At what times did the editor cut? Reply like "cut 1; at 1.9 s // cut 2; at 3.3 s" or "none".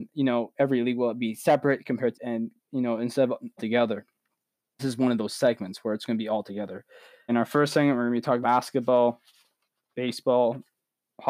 cut 1; at 2.1 s // cut 2; at 3.6 s // cut 3; at 4.8 s // cut 4; at 7.3 s // cut 5; at 8.4 s